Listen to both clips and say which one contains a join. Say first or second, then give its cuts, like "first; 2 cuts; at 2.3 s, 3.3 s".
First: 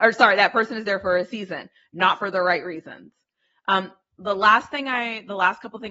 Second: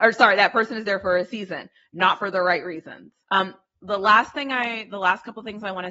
second; 1 cut; at 3.2 s